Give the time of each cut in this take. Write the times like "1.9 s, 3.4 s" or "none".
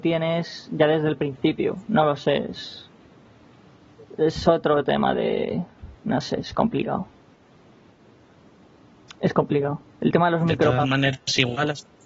none

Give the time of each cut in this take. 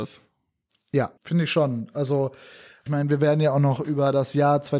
1.2 s, 2.9 s

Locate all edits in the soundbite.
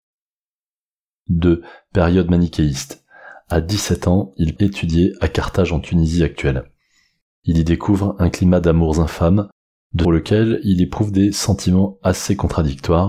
4.6 s, 10.0 s

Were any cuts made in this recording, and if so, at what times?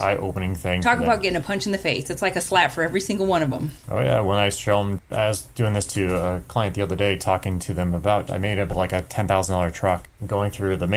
8.3 s, 8.7 s

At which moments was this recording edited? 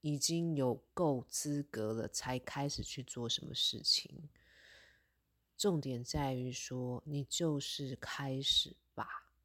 none

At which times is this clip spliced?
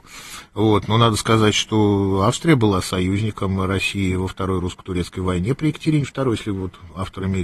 none

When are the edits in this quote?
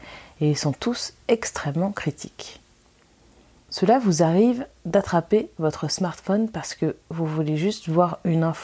none

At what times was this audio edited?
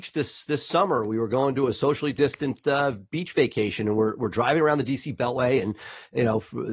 none

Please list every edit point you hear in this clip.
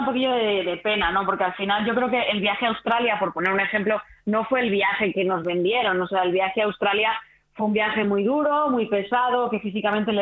none

